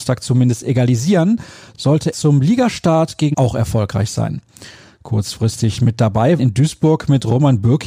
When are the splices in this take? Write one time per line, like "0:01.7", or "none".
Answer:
0:02.1
0:03.3
0:05.8
0:06.4